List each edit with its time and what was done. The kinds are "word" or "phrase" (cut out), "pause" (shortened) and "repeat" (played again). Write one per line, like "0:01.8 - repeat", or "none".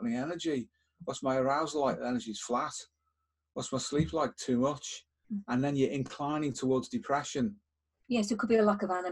none